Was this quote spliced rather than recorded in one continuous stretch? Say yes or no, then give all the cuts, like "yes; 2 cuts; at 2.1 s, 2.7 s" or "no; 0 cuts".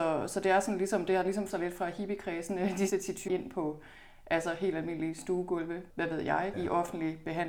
yes; 5 cuts; at 1.5 s, 2.9 s, 3.3 s, 5.9 s, 6.5 s